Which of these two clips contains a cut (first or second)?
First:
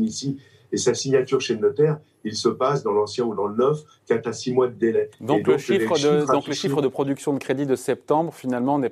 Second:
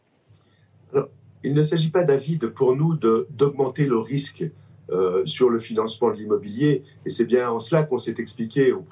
first